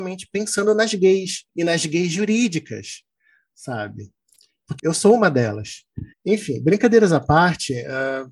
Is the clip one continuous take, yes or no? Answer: no